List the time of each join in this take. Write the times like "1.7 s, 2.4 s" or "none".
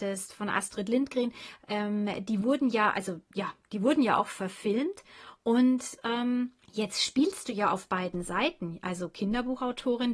6.6 s